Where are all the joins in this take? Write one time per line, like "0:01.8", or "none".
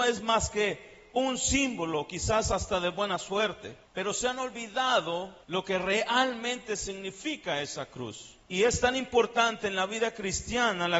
0:03.8
0:05.4
0:08.4

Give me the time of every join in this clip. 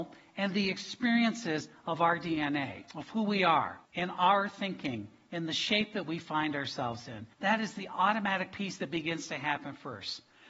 0:02.9
0:03.8
0:07.3

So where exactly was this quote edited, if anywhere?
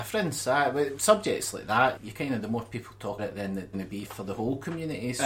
0:01.0
0:02.0
0:03.2
0:03.7
0:04.1

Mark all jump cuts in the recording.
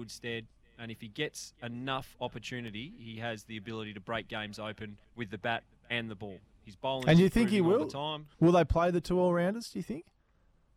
0:05.0
0:08.3

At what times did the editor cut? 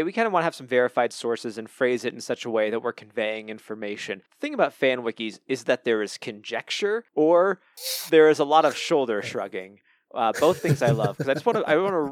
0:04.3
0:07.1

